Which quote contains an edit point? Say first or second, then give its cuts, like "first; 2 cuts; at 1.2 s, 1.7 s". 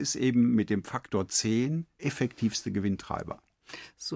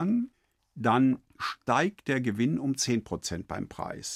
first; 1 cut; at 2.0 s